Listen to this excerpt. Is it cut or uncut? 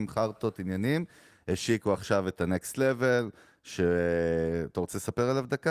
uncut